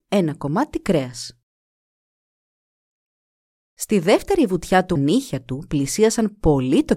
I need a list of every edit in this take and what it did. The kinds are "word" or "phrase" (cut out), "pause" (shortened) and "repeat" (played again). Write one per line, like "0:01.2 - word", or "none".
0:05.0 - phrase